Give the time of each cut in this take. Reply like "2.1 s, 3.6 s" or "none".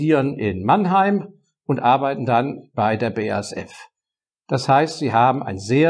none